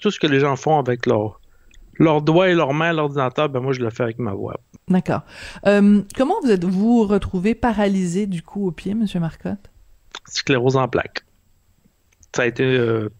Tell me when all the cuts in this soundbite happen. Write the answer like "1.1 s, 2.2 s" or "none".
none